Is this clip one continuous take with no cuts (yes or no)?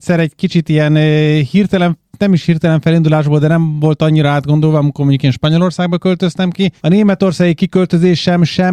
no